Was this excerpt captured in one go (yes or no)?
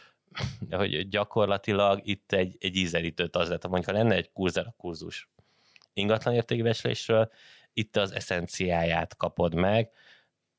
yes